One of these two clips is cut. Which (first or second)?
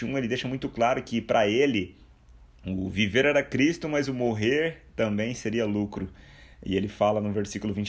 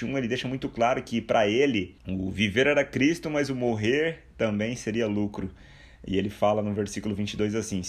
second